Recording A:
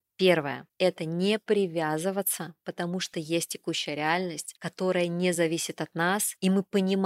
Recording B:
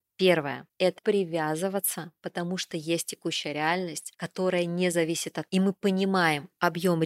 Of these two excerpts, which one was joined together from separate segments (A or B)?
B